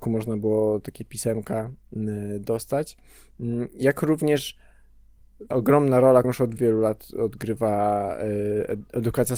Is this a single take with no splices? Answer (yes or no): no